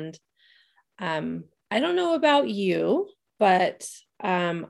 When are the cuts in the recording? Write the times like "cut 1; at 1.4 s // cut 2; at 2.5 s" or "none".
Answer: cut 1; at 3.3 s